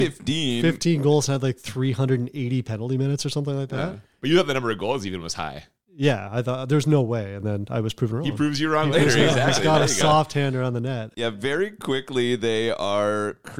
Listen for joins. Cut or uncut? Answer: uncut